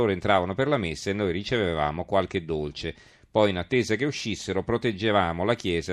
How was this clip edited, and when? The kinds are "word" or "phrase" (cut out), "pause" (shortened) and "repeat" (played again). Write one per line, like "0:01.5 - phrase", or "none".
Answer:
none